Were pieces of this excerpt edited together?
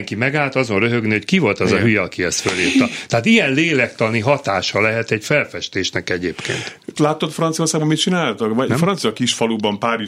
yes; 1 cut; at 7.0 s

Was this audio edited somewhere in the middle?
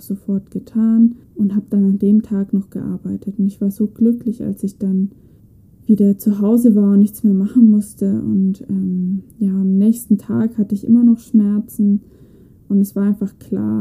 yes; 3 cuts; at 1.2 s, 5.4 s, 9.3 s

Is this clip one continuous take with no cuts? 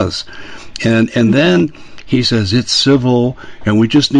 yes; 0 cuts

